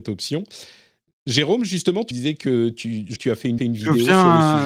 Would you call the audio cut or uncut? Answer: cut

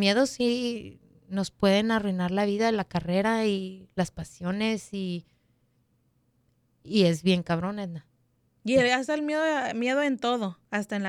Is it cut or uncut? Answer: uncut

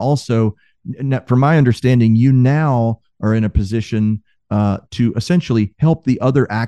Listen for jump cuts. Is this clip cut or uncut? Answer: uncut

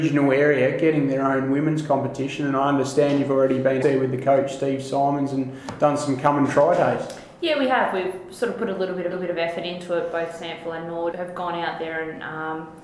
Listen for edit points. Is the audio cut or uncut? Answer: cut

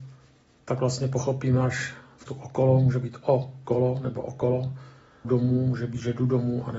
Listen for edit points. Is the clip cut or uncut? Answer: cut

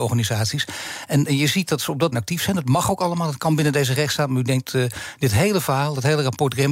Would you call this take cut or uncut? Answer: cut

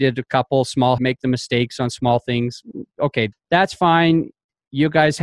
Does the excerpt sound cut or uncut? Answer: cut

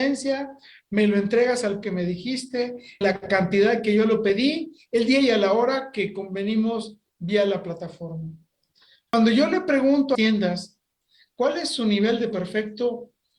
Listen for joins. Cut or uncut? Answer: cut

